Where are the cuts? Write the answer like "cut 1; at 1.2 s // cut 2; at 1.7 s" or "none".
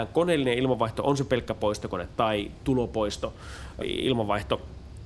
cut 1; at 3.8 s